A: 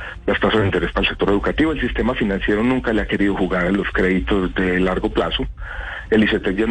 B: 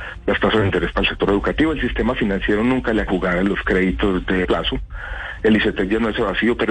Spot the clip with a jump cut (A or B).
B